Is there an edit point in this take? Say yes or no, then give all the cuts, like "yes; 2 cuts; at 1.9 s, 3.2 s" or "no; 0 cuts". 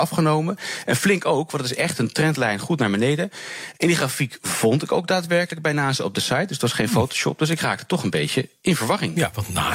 no; 0 cuts